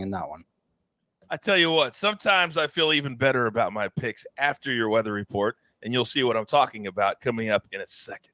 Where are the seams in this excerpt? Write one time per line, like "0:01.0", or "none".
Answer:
none